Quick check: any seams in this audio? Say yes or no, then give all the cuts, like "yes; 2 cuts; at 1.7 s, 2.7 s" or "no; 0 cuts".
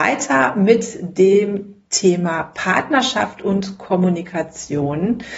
yes; 1 cut; at 1.8 s